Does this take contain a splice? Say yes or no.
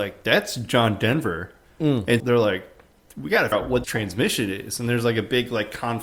yes